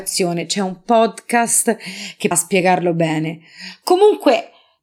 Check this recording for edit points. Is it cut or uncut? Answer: cut